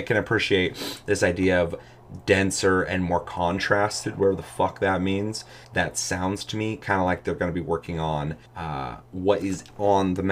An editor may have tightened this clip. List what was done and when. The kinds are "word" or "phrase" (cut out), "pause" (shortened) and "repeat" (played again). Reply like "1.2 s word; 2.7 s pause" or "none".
5.6 s pause; 8.5 s pause